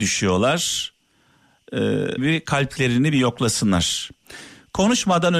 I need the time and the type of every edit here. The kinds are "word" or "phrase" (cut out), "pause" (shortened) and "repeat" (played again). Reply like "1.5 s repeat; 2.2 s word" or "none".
2.2 s word

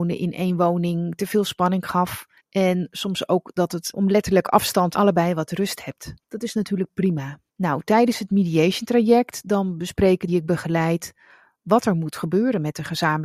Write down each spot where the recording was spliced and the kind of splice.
2.4 s pause; 3.9 s word; 4.9 s phrase; 6.2 s pause; 7.5 s pause; 10.3 s phrase

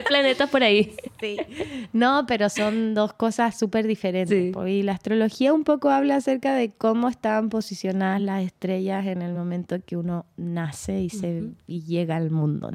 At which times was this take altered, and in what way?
none

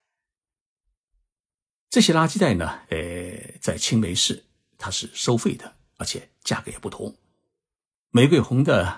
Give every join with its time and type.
none

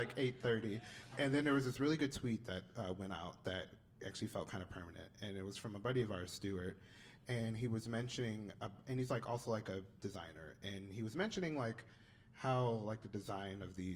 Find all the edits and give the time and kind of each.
1.1 s word

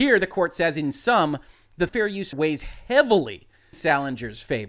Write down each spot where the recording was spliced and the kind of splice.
1.9 s word; 2.3 s word; 3.7 s word

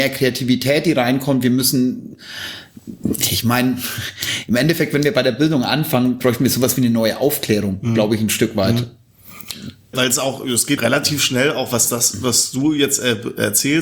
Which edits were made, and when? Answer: 6.2 s word; 9.9 s word; 10.8 s word

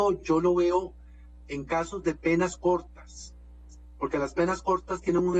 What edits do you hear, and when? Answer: none

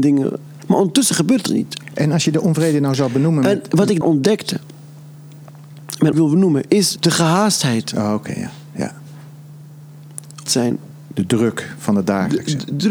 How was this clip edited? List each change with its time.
1.5 s phrase; 4.0 s word; 6.1 s phrase; 7.0 s word; 10.5 s word

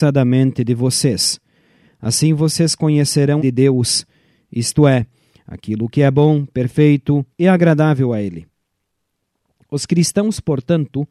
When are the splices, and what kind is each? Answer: 3.4 s phrase; 7.3 s pause

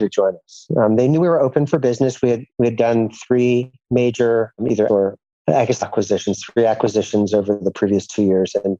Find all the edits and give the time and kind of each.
4.9 s word; 5.8 s phrase

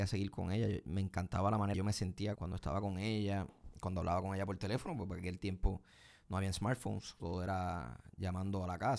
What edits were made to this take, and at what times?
1.7 s word; 2.3 s word; 7.2 s word

